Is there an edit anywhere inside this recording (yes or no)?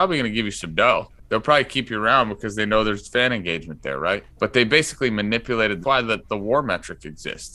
yes